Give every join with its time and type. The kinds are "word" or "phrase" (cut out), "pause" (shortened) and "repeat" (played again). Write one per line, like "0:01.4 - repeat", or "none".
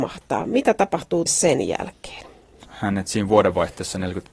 0:01.3 - word